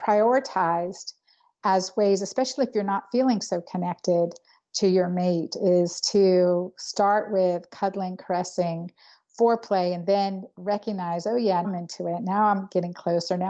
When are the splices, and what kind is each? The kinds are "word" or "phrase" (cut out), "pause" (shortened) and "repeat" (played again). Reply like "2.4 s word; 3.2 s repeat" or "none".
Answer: 11.6 s word